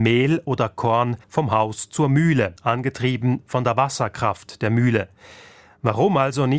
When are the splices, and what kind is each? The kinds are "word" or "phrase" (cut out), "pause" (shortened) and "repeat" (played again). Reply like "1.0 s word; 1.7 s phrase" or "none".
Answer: 1.2 s pause; 2.6 s pause